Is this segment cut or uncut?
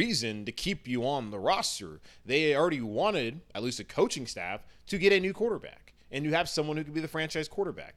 uncut